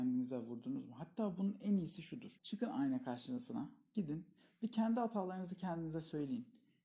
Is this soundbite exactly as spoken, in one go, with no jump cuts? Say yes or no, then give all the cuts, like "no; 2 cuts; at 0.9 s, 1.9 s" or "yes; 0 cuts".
no; 1 cut; at 2.4 s